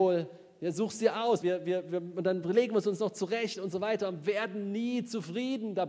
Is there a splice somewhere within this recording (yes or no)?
yes